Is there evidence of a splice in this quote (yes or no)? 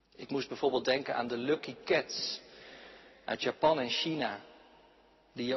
no